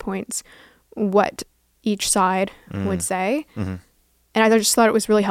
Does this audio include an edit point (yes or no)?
no